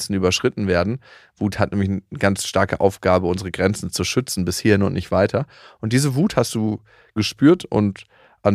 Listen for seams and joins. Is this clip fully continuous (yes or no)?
yes